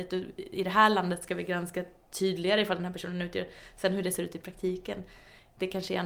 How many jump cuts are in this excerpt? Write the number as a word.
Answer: zero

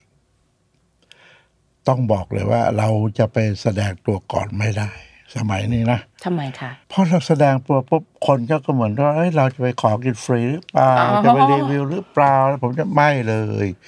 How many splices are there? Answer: one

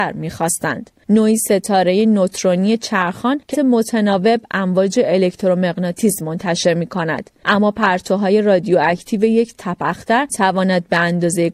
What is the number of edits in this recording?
two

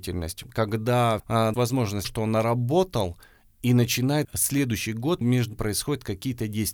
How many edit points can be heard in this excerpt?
six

